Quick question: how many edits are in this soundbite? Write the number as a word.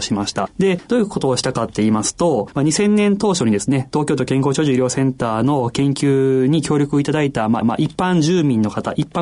one